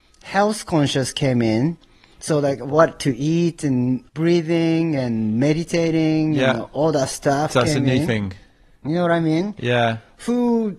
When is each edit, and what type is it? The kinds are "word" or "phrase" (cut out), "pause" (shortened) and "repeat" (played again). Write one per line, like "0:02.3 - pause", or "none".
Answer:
0:04.1 - phrase